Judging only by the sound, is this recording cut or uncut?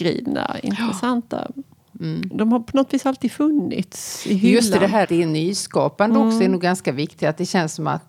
cut